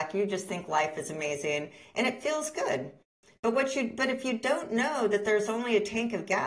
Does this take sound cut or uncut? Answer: uncut